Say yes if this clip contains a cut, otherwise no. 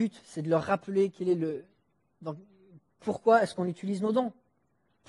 no